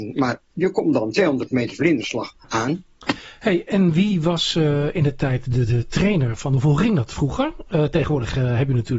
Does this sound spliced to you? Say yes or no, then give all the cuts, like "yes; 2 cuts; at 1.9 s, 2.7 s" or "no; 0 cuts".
no; 0 cuts